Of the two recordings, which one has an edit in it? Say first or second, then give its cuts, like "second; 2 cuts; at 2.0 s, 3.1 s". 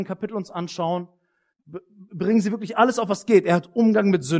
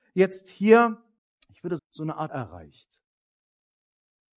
second; 3 cuts; at 1.2 s, 1.8 s, 2.3 s